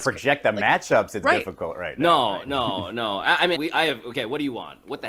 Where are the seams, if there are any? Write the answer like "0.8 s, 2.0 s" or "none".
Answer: 1.2 s, 3.5 s